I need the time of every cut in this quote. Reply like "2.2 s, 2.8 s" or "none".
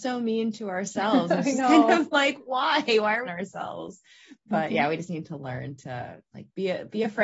2.4 s, 3.2 s